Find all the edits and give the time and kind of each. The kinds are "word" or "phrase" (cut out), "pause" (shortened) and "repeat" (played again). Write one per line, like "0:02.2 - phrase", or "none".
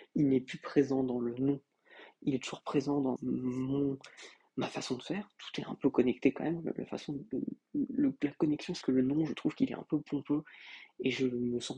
0:03.2 - word
0:08.8 - word